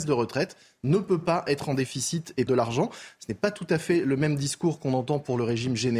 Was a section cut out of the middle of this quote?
yes; 1 cut; at 2.5 s

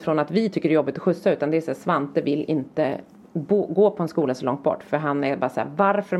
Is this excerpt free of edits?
yes; 0 cuts

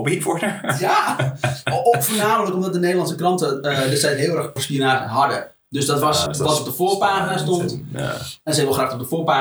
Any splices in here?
yes; 2 cuts; at 4.6 s, 6.3 s

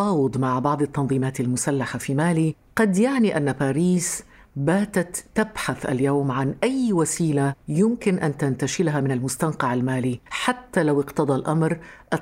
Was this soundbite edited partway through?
no; 0 cuts

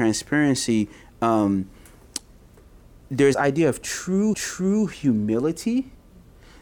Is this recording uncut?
no; 2 cuts; at 3.3 s, 4.3 s

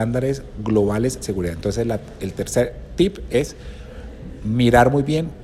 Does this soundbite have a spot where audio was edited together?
yes; 1 cut; at 1.2 s

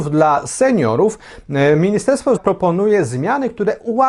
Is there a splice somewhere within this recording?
yes; 1 cut; at 2.4 s

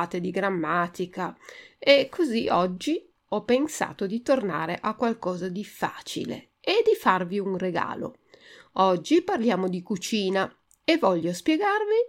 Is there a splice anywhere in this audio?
no; 0 cuts

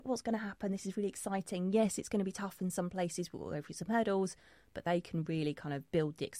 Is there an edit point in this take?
no; 0 cuts

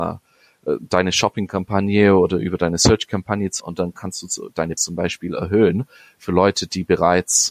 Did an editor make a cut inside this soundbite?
yes; 2 cuts; at 3.6 s, 4.8 s

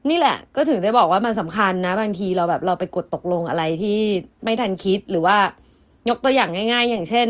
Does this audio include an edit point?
yes; 1 cut; at 4.3 s

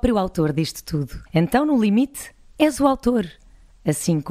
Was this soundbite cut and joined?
yes; 1 cut; at 1.3 s

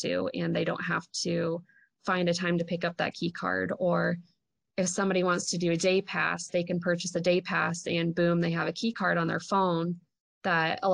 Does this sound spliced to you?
no; 0 cuts

